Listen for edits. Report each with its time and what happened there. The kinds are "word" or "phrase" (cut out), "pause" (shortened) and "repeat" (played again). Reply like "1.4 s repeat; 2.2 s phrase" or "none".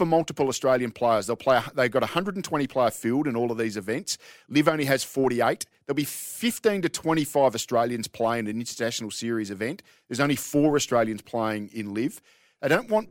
none